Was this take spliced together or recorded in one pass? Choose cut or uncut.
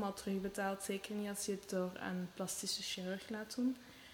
uncut